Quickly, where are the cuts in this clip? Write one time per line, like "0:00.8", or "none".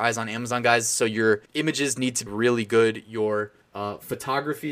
0:01.5
0:02.3
0:03.6

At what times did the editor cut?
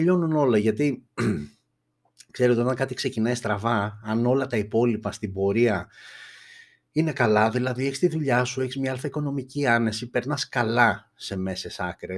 none

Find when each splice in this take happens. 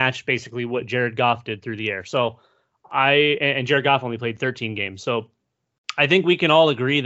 none

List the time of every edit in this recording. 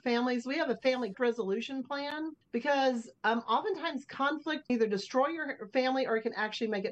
0:01.1
0:02.4
0:04.7

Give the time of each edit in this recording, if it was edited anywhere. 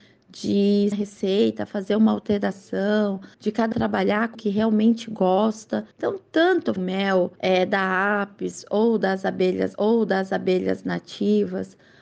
0:00.9
0:03.3
0:03.7
0:04.3
0:05.9
0:06.8
0:07.4
0:09.7

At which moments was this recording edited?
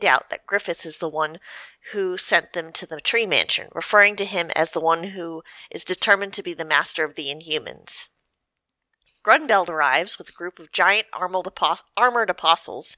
none

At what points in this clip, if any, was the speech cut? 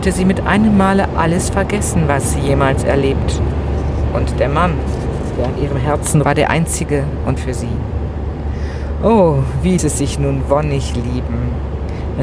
0:06.2
0:07.4
0:09.8

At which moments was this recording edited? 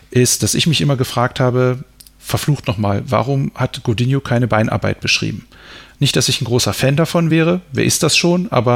none

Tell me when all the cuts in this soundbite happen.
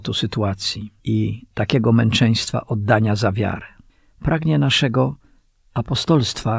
0:01.0
0:03.9

